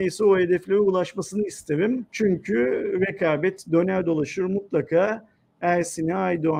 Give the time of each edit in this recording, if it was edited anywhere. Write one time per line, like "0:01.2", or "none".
0:02.1